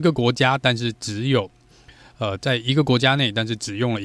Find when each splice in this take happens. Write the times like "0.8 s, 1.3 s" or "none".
none

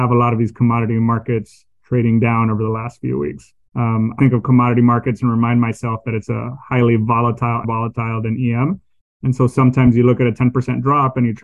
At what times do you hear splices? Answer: 3.6 s, 4.2 s, 7.6 s

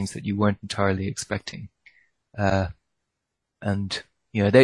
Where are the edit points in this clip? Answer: none

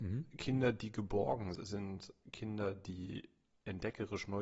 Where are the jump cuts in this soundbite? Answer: 1.5 s

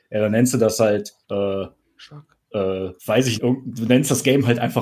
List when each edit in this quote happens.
1.2 s, 3.0 s, 3.4 s

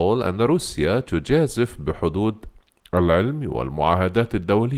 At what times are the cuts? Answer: none

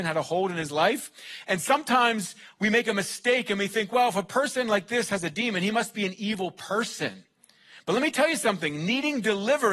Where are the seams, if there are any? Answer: none

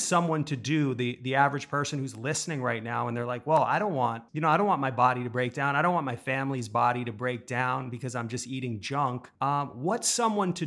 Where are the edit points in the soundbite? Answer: 4.3 s, 9.3 s

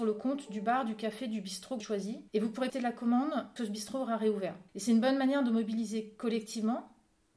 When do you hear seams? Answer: 1.8 s, 2.3 s, 2.7 s, 3.6 s, 4.7 s

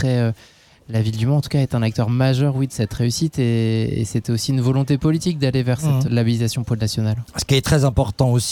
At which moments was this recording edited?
6.1 s

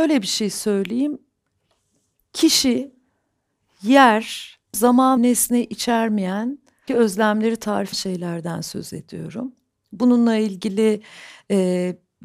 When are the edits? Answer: 4.7 s, 5.2 s, 6.9 s, 7.9 s

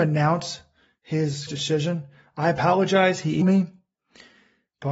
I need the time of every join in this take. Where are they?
1.5 s, 3.4 s

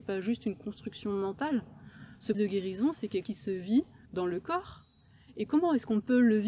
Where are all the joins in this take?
2.3 s, 3.2 s, 4.1 s

